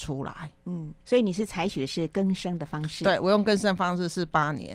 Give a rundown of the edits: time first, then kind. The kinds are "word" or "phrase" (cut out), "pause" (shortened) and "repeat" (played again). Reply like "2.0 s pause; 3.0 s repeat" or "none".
1.0 s pause